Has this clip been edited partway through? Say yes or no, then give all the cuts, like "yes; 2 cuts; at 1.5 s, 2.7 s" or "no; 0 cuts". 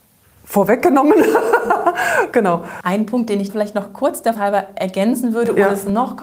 yes; 3 cuts; at 2.3 s, 3.5 s, 4.3 s